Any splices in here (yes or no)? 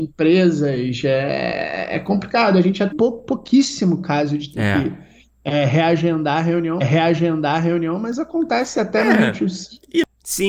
yes